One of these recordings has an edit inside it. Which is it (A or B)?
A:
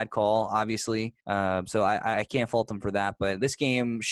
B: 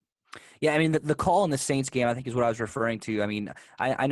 A